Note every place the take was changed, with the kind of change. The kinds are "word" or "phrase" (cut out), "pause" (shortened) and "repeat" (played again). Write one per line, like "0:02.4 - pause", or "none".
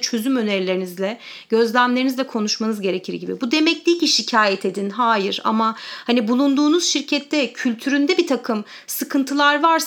none